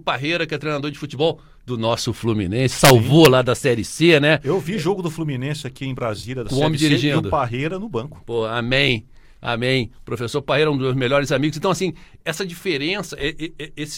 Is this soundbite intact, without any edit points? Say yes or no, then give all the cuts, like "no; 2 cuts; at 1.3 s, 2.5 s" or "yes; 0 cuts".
no; 1 cut; at 12.2 s